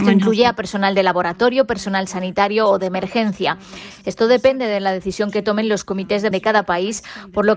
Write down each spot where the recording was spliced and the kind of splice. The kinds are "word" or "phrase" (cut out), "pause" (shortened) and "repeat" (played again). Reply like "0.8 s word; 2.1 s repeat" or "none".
6.3 s word